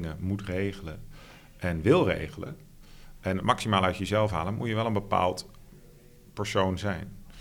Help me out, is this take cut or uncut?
uncut